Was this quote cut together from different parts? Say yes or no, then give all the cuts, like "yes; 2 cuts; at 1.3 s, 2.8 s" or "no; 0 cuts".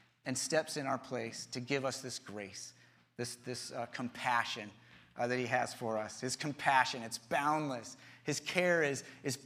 no; 0 cuts